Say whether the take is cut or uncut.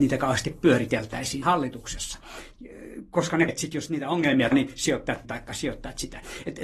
cut